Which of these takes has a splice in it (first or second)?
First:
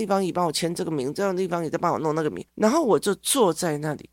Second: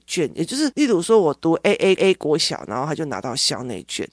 second